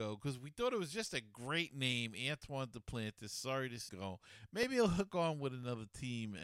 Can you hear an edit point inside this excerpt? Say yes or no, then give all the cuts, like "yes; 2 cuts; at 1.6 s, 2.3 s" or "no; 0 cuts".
yes; 1 cut; at 3.9 s